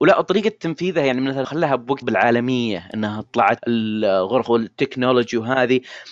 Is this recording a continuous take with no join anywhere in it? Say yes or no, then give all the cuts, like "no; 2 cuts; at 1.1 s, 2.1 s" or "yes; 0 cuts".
no; 4 cuts; at 1.4 s, 2.0 s, 3.6 s, 4.5 s